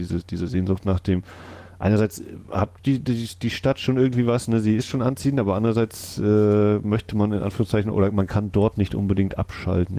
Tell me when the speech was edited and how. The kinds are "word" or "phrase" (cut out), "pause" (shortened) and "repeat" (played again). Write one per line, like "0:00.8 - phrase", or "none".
none